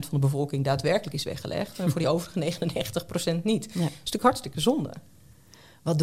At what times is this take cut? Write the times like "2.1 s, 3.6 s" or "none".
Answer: none